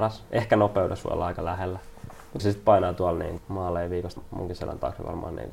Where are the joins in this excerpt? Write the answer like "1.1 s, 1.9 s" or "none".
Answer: 2.4 s, 3.4 s, 4.2 s